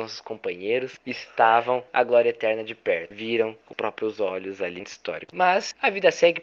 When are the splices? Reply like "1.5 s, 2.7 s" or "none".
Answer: 1.9 s, 3.7 s, 4.8 s

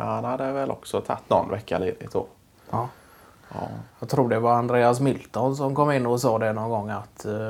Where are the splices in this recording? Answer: 3.9 s

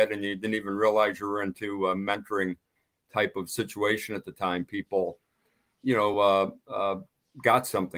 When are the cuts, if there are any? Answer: none

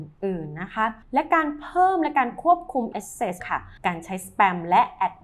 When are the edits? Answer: 1.0 s, 2.9 s, 3.4 s, 3.8 s

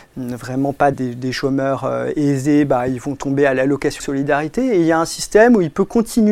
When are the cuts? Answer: 0.9 s, 4.0 s

